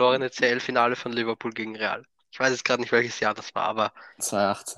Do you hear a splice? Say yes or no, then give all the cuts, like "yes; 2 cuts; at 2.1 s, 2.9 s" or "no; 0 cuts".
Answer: no; 0 cuts